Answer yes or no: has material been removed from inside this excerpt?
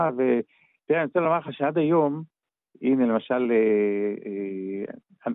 no